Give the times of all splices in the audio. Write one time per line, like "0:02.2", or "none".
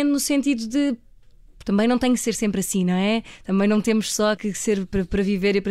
0:04.4